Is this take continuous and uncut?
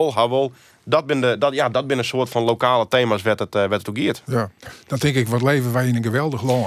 yes; 0 cuts

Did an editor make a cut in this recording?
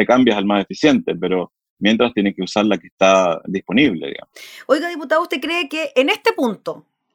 no; 0 cuts

